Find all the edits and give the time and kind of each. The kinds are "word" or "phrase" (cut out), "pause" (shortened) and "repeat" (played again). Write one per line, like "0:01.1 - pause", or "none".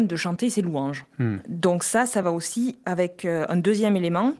none